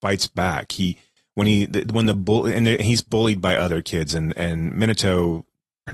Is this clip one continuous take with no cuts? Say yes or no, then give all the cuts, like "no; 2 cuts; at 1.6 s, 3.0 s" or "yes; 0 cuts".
yes; 0 cuts